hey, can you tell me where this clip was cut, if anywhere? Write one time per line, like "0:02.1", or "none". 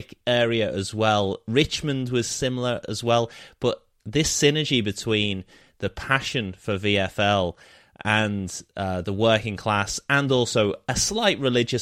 none